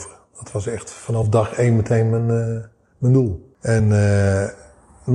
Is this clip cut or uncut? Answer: uncut